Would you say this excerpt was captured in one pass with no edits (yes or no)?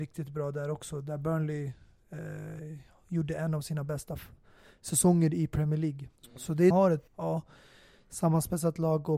no